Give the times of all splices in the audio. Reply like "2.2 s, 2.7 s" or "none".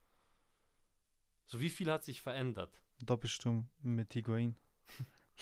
2.9 s